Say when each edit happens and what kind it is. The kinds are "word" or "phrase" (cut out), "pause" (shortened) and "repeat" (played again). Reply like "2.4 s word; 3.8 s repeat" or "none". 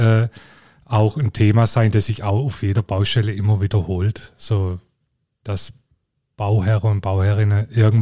none